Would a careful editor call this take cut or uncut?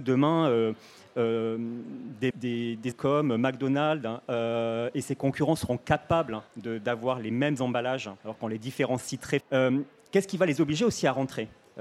cut